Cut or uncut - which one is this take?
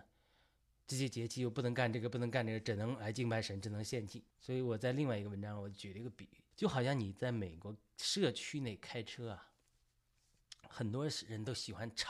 cut